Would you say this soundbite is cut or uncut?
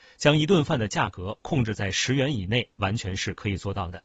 uncut